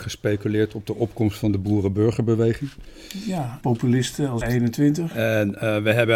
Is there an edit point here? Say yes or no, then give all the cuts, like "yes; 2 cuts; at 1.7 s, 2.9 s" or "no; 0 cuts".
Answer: yes; 2 cuts; at 3.6 s, 4.4 s